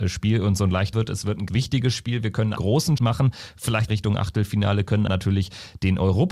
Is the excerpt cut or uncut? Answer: cut